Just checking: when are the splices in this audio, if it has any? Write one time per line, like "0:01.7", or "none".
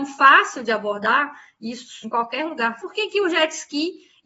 0:02.0
0:02.8